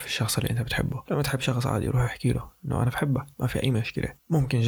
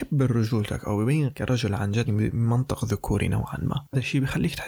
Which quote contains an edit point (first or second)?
second